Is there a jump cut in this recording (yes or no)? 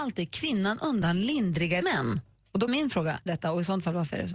yes